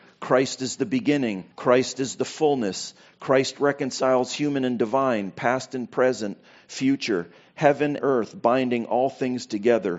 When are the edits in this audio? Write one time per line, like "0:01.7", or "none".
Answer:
0:01.5
0:08.0